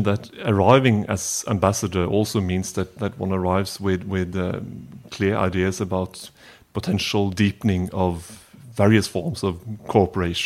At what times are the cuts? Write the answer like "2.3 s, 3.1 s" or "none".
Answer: none